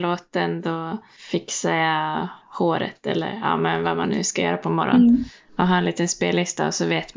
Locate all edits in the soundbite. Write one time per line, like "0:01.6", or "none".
none

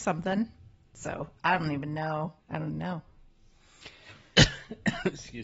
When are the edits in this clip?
0:02.4
0:02.7

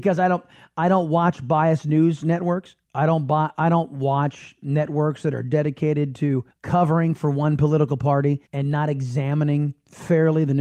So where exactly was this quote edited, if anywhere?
0:02.8
0:06.5
0:08.5

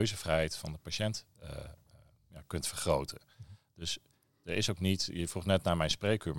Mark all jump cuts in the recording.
none

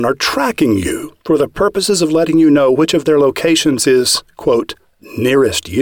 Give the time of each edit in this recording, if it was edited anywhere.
0:01.2

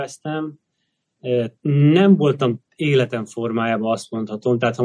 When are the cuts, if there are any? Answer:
0:01.6
0:02.7

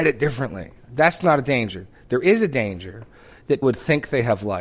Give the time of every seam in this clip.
0:03.6

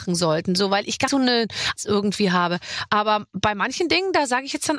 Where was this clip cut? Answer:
0:01.1
0:01.8

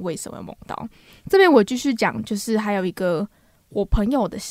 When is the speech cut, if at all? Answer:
none

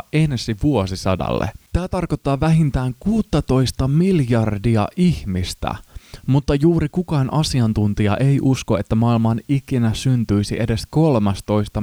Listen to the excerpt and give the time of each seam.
0:01.7

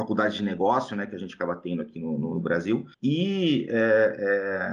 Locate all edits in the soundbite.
0:02.9

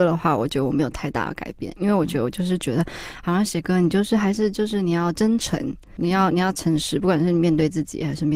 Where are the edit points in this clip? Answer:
0:06.0

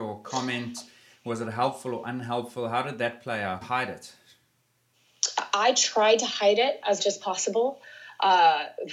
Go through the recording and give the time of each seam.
0:03.6
0:07.0

